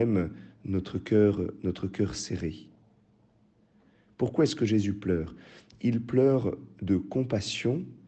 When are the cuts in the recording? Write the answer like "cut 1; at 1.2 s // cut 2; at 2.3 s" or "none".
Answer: none